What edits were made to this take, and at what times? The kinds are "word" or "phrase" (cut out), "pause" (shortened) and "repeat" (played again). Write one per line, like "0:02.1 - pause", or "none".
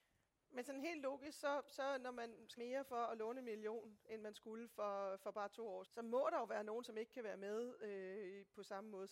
0:02.6 - phrase
0:05.8 - word